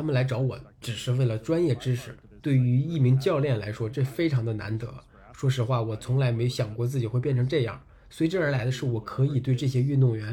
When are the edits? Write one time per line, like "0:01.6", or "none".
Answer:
0:02.3